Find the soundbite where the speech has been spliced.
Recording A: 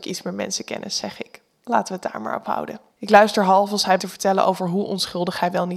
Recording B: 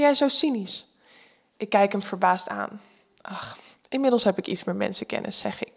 A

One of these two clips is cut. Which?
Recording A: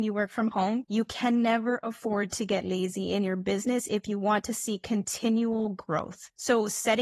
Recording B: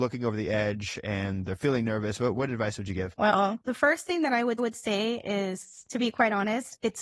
B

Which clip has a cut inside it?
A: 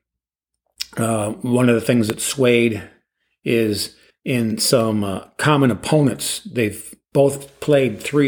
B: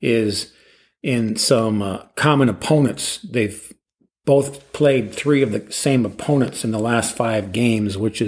A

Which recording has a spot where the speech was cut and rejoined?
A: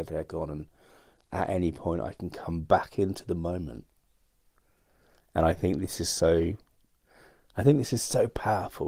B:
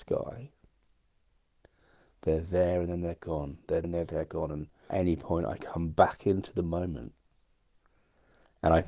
B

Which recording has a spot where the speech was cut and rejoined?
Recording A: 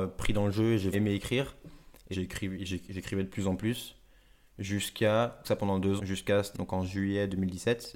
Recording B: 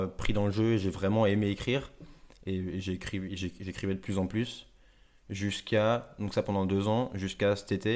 A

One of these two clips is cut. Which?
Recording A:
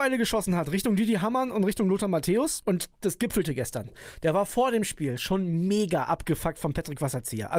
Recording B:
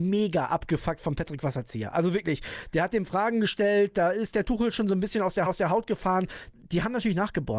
B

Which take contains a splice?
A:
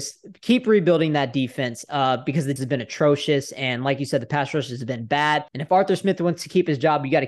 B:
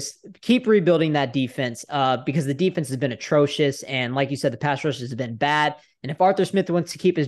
A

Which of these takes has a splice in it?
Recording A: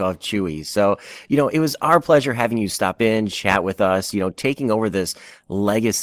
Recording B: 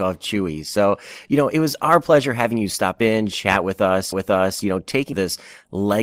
B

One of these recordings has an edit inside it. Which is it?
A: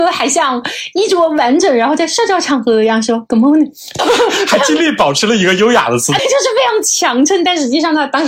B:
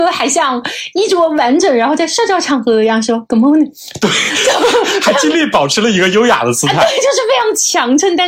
A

